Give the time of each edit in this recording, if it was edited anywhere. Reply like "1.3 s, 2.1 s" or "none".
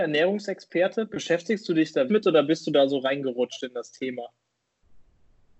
2.1 s